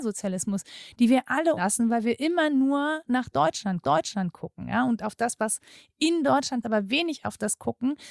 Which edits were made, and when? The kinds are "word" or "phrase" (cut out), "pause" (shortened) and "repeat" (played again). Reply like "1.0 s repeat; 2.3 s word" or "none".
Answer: 1.6 s phrase; 3.8 s repeat; 6.6 s phrase